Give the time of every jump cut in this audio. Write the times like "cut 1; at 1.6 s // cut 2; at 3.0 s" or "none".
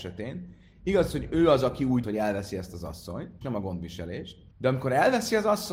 cut 1; at 2.0 s // cut 2; at 3.4 s // cut 3; at 4.5 s

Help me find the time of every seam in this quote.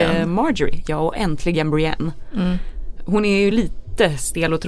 none

